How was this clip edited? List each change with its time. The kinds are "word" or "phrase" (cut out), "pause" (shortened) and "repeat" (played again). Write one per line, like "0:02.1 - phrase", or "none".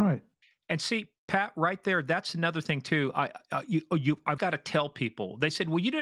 0:04.4 - word